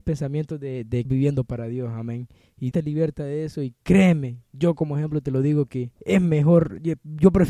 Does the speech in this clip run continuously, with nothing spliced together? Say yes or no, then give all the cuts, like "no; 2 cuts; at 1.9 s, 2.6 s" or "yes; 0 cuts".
no; 3 cuts; at 1.0 s, 2.7 s, 6.0 s